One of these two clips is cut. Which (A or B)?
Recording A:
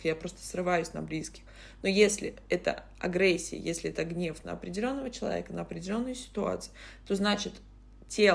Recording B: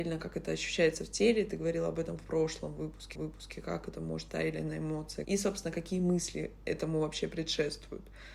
B